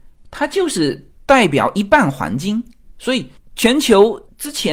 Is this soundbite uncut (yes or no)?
yes